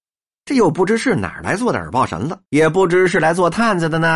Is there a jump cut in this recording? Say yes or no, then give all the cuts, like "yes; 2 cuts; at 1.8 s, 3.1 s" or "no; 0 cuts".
yes; 1 cut; at 2.4 s